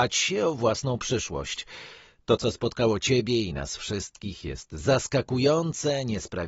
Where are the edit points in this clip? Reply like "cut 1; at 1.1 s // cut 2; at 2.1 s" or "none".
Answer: none

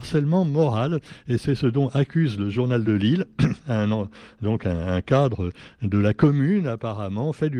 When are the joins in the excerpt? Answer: none

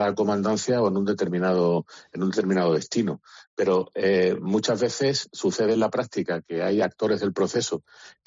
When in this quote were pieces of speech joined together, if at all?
none

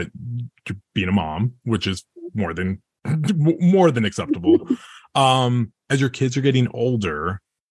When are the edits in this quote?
none

